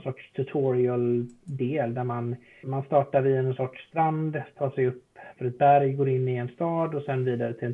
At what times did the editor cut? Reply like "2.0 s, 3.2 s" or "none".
2.6 s